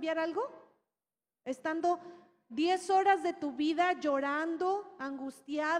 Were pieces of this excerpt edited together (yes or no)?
no